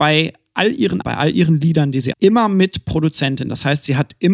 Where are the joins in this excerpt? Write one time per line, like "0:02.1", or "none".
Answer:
0:01.0
0:02.1